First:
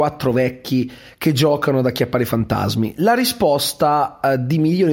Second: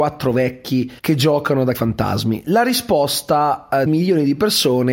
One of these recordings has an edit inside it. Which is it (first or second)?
second